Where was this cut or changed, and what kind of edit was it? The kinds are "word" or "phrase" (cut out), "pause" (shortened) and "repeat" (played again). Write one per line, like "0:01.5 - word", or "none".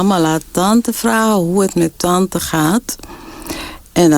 none